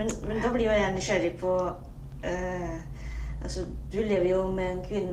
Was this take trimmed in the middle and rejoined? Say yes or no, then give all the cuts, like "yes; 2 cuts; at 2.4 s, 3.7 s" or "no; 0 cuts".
no; 0 cuts